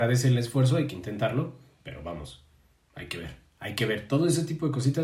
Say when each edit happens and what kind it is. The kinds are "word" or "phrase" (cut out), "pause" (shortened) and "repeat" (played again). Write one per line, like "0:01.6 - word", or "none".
none